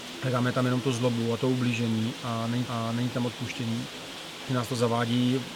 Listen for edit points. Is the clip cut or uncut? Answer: cut